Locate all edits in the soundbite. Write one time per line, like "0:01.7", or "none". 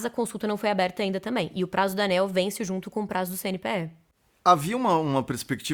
none

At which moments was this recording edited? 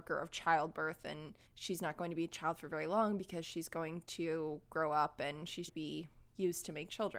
0:01.5
0:05.7

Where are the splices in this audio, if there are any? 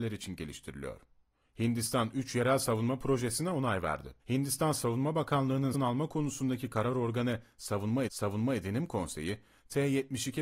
0:01.3
0:04.2
0:05.7
0:08.1

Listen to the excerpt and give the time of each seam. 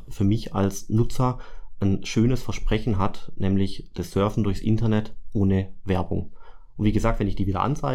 none

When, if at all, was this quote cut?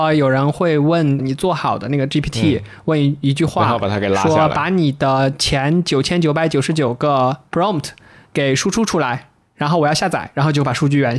none

